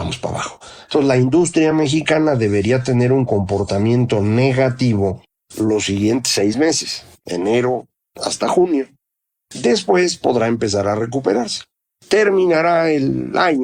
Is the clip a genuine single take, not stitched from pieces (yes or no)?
yes